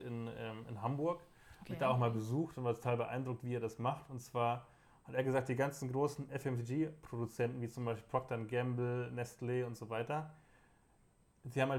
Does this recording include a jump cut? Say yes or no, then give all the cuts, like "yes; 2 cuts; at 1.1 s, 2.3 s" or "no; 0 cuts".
no; 0 cuts